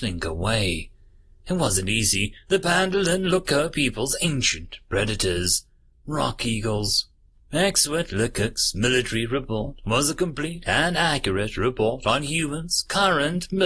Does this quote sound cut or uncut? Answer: cut